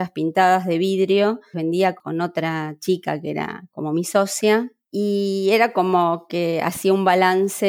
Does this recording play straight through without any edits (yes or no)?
no